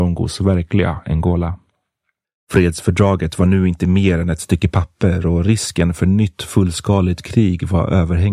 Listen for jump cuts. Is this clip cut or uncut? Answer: cut